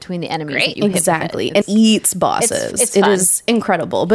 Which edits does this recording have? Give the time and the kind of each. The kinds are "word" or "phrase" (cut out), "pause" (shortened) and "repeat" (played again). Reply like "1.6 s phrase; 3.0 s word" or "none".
1.6 s word